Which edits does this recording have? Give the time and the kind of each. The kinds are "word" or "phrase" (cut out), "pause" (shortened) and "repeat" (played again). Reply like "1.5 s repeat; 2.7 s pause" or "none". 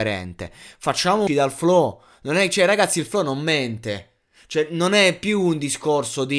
1.3 s phrase